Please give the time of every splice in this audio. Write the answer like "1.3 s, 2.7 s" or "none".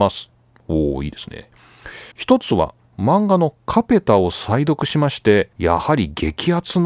2.1 s, 5.5 s